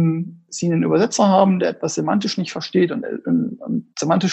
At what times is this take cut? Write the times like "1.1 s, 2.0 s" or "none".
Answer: none